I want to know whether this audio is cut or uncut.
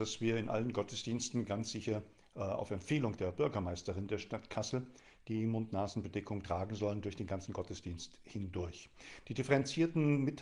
uncut